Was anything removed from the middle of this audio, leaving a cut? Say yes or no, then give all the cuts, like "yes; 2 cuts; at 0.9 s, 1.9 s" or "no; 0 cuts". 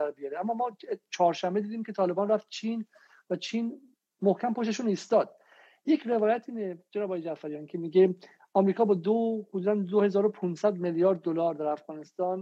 no; 0 cuts